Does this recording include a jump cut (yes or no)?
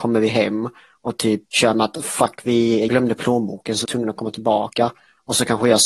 yes